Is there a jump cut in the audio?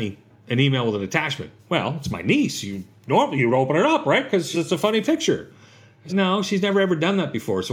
yes; 3 cuts; at 1.6 s, 4.5 s, 6.1 s

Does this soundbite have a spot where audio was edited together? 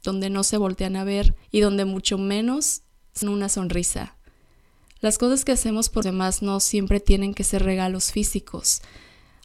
yes; 3 cuts; at 1.4 s, 3.2 s, 6.0 s

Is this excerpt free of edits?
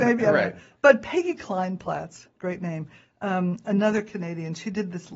yes; 0 cuts

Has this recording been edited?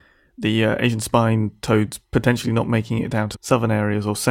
yes; 1 cut; at 3.3 s

